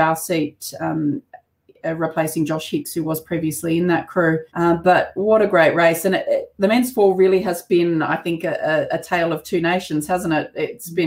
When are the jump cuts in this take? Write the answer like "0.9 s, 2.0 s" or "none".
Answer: 4.5 s